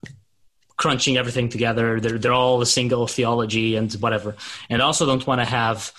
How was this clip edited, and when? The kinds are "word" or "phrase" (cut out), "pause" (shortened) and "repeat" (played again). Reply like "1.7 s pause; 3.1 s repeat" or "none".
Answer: none

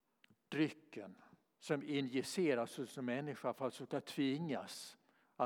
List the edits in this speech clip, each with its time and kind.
none

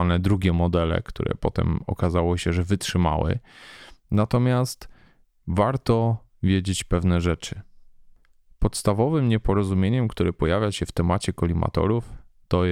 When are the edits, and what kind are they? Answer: none

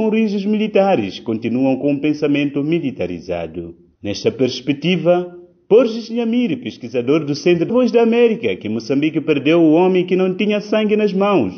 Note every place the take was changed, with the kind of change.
7.7 s phrase

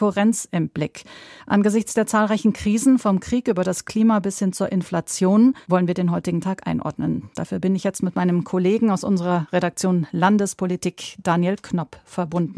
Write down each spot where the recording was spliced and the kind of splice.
1.4 s pause; 5.6 s pause

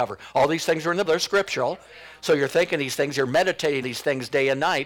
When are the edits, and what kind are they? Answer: 1.0 s word; 3.8 s word

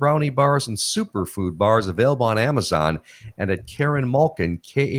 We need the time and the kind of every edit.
none

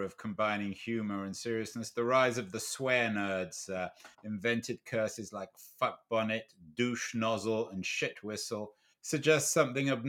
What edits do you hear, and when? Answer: 4.1 s pause; 8.9 s pause

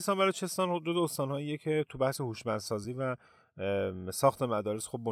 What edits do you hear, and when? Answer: none

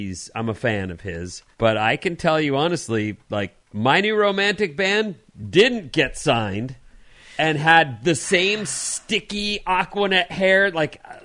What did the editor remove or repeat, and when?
1.5 s pause; 3.6 s pause

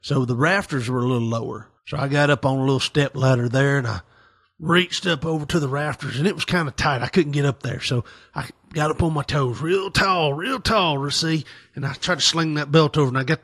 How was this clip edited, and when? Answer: 1.8 s pause; 9.2 s word

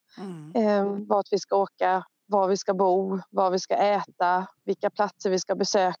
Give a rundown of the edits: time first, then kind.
2.1 s pause; 4.6 s pause

